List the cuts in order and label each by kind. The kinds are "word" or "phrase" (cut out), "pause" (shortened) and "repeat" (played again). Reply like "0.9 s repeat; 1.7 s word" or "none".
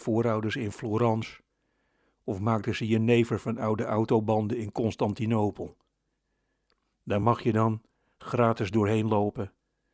none